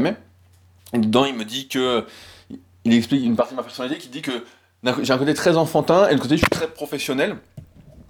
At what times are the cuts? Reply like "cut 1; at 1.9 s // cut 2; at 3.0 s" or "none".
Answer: none

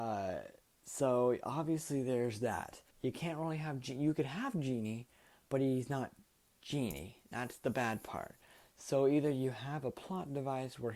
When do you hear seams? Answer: cut 1; at 2.9 s

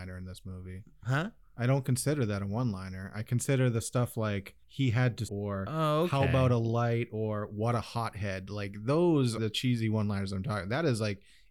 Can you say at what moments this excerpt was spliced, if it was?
cut 1; at 4.6 s // cut 2; at 5.3 s // cut 3; at 9.4 s

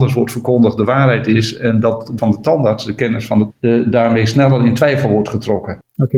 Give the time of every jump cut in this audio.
cut 1; at 2.2 s // cut 2; at 3.5 s

